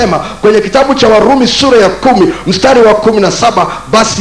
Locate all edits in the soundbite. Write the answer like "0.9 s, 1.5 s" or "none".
none